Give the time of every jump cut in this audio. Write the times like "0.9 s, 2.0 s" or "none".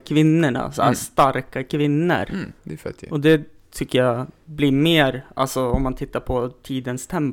2.6 s